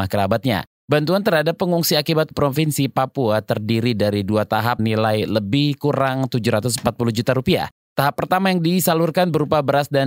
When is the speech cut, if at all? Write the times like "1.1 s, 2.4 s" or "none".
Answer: 2.3 s, 4.8 s